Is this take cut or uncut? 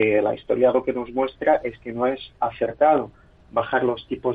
uncut